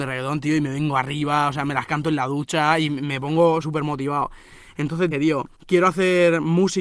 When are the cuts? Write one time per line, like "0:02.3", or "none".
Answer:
0:03.6
0:05.1
0:05.5